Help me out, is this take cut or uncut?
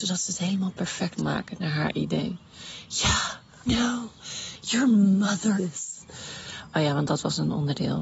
cut